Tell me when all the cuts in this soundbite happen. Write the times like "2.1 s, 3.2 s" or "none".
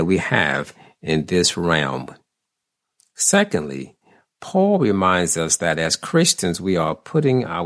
none